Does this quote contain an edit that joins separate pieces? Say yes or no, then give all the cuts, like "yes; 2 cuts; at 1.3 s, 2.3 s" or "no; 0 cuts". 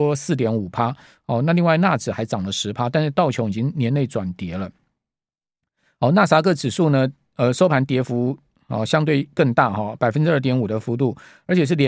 no; 0 cuts